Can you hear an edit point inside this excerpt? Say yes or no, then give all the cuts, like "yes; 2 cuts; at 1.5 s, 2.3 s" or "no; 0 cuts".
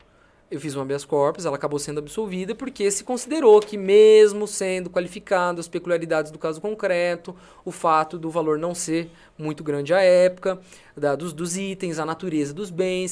no; 0 cuts